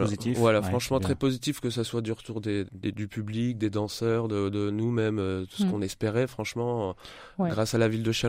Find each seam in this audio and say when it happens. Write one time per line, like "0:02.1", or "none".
0:02.7